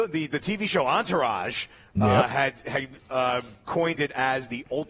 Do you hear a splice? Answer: no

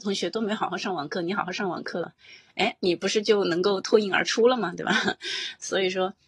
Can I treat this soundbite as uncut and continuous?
yes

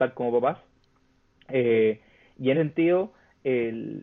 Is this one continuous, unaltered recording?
no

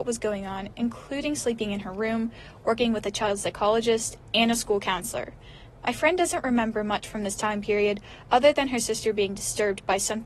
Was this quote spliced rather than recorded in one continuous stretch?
no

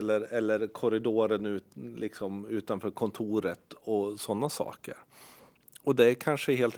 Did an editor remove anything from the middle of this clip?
no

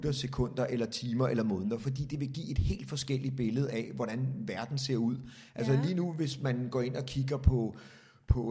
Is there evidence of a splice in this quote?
no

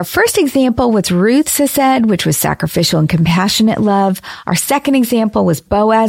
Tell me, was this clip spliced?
no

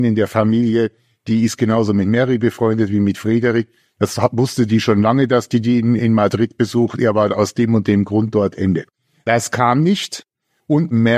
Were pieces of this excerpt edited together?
no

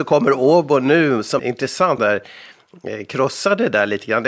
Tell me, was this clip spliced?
yes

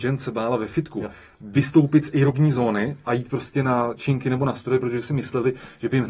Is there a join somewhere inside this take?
no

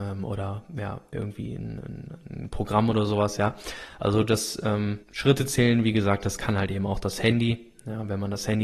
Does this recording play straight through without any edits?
no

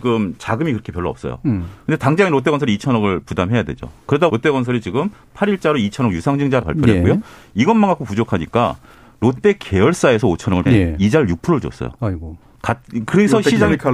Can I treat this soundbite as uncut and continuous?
no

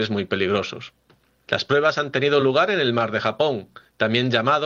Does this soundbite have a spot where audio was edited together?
no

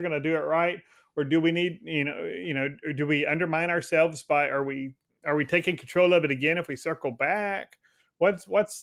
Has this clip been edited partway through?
no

